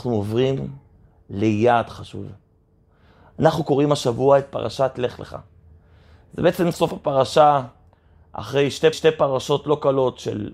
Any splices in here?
yes; 2 cuts; at 6.7 s, 8.9 s

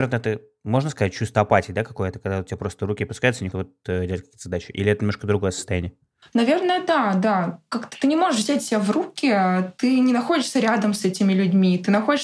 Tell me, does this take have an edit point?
yes; 1 cut; at 3.5 s

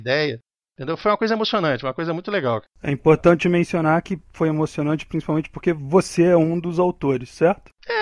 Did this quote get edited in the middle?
no; 0 cuts

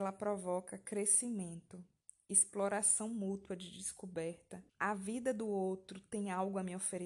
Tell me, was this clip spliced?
yes; 1 cut; at 4.7 s

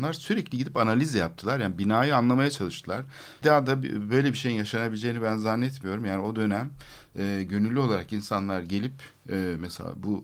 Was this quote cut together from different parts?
yes; 1 cut; at 3.4 s

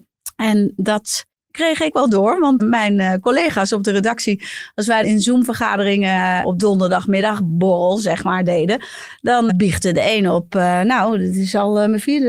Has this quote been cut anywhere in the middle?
yes; 5 cuts; at 1.9 s, 2.6 s, 5.0 s, 6.6 s, 9.5 s

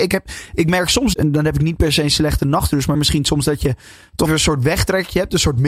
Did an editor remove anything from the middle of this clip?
yes; 3 cuts; at 1.1 s, 2.9 s, 4.3 s

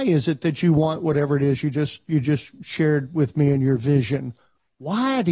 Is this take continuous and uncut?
yes; 0 cuts

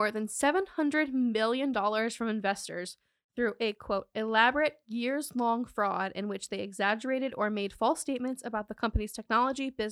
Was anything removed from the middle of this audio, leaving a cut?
no; 0 cuts

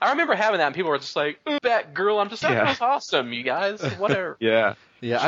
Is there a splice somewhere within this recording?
yes; 2 cuts; at 1.6 s, 2.4 s

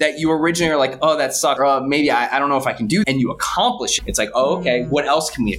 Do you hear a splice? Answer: yes; 3 cuts; at 1.6 s, 3.0 s, 4.0 s

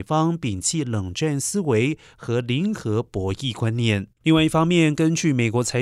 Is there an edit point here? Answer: yes; 1 cut; at 4.2 s

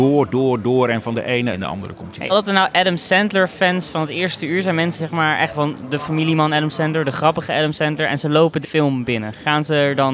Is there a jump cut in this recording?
yes; 5 cuts; at 1.5 s, 2.3 s, 5.0 s, 5.5 s, 8.6 s

